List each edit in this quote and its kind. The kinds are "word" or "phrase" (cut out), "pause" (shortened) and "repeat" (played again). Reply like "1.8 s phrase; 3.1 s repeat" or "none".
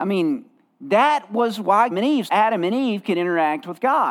1.9 s phrase; 2.3 s word